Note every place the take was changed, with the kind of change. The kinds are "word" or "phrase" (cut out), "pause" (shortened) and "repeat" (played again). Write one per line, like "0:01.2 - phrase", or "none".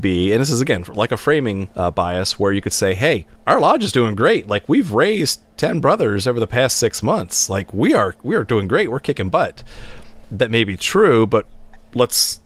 0:01.7 - pause
0:03.4 - pause